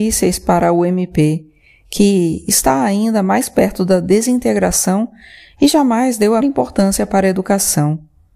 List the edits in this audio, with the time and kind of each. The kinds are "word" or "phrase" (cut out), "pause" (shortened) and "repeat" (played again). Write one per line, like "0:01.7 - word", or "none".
0:06.4 - word